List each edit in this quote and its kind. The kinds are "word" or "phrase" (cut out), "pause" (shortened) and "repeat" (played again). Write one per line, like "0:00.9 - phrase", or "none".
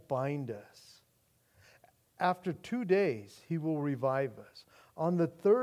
none

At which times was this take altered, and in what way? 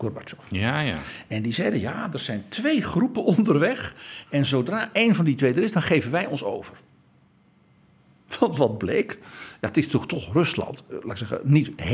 0:10.9 - word

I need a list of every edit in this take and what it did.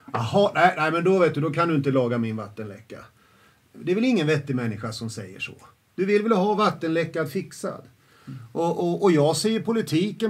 none

